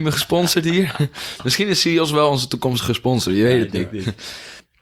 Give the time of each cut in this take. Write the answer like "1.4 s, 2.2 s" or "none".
none